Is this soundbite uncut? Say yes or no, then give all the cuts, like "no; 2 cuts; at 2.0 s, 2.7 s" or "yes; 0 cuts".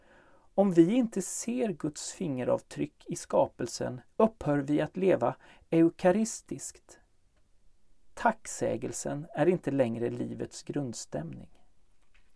no; 1 cut; at 4.1 s